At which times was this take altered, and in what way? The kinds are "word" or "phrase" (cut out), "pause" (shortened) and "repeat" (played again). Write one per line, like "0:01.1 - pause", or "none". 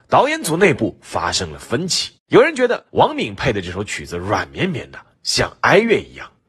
0:02.2 - pause
0:02.9 - pause